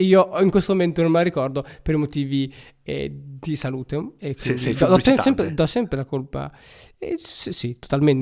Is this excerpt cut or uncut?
uncut